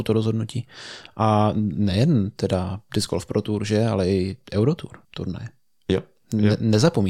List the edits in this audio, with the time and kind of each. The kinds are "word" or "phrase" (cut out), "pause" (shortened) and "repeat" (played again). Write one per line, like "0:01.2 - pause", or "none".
0:05.0 - pause